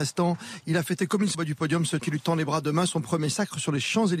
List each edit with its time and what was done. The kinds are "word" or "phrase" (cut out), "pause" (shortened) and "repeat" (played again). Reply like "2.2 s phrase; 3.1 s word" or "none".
1.3 s word; 2.0 s word